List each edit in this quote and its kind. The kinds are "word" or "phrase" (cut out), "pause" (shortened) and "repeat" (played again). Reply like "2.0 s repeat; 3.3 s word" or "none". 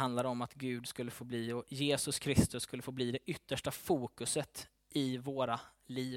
none